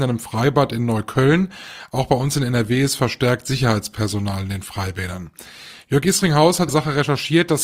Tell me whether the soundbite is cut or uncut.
cut